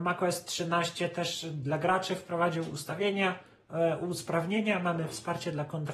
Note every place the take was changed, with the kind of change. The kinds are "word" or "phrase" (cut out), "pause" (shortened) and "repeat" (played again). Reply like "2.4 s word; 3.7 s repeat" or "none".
none